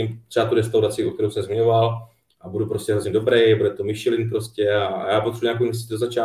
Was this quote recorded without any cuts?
yes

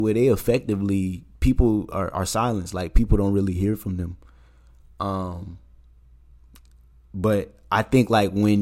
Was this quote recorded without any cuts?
no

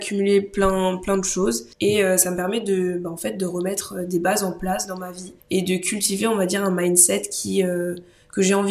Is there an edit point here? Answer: yes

